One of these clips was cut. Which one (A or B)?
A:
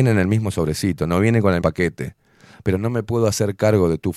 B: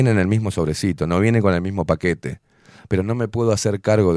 A